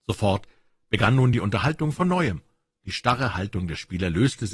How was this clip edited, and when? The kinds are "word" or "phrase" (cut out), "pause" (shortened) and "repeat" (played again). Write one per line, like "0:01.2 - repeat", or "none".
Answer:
none

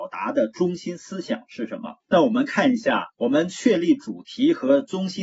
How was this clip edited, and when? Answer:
0:02.0 - pause
0:03.1 - pause

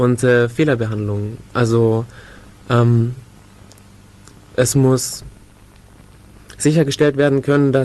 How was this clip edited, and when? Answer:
none

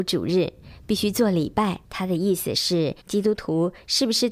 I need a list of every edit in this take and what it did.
0:01.8 - pause
0:03.0 - pause

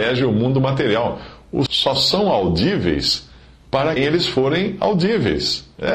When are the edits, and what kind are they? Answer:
0:01.7 - word
0:04.0 - word

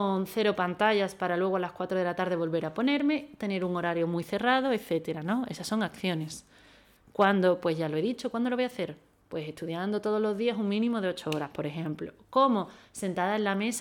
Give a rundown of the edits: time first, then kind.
none

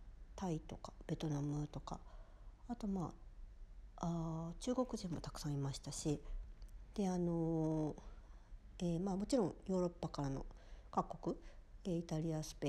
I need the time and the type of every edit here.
none

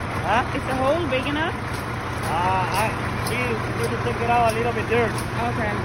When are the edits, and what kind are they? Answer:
0:03.9 - word

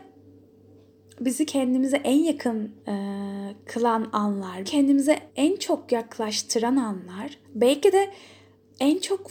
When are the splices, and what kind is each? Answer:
0:02.8 - pause
0:04.6 - word
0:05.3 - pause
0:07.4 - pause

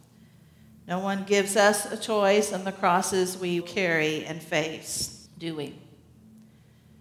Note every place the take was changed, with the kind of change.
0:03.6 - word
0:05.3 - pause

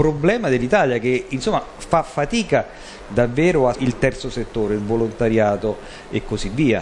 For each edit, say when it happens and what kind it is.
0:03.7 - word

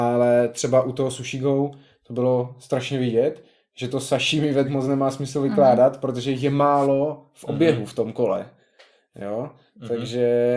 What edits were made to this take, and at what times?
0:04.6 - word

